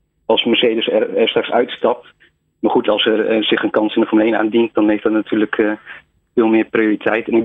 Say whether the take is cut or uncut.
uncut